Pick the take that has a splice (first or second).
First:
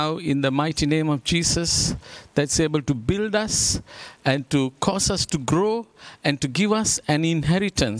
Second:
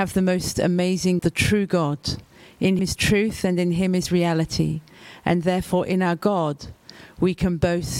second